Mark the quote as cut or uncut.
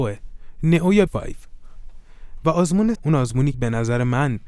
cut